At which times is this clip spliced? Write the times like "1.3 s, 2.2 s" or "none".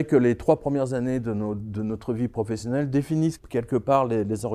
3.4 s